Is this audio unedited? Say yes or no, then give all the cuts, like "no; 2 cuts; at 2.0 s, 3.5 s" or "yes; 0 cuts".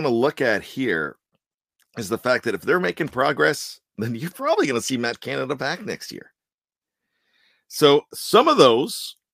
yes; 0 cuts